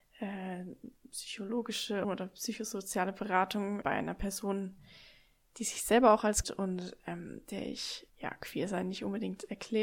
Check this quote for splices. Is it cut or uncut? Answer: cut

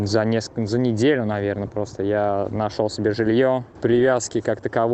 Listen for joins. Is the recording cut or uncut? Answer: uncut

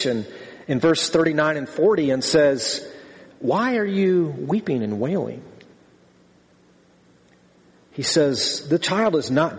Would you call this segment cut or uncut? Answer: uncut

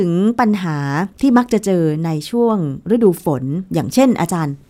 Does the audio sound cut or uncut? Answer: cut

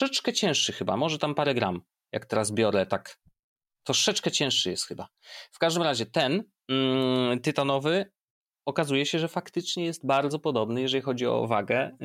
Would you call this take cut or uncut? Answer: uncut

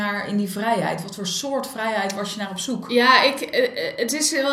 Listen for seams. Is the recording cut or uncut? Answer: uncut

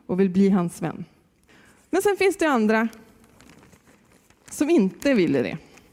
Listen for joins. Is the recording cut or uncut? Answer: uncut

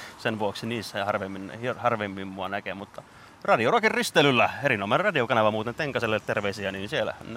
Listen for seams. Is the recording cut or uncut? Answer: uncut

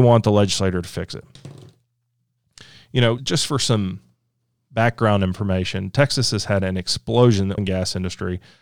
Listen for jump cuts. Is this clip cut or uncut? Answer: cut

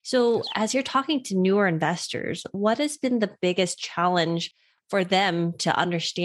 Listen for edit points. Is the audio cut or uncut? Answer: uncut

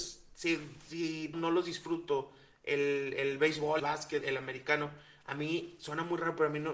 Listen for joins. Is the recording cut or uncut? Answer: cut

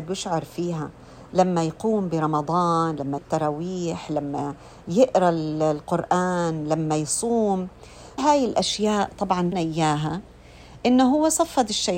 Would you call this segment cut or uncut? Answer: cut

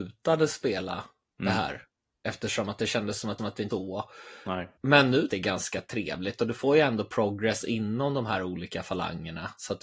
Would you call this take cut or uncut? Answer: cut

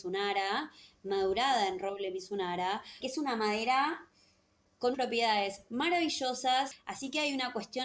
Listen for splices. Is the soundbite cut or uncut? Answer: cut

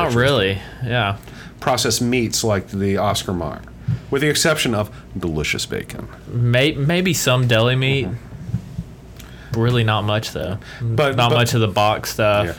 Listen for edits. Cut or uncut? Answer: uncut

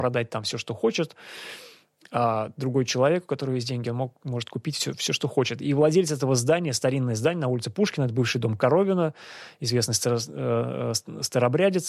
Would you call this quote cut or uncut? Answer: uncut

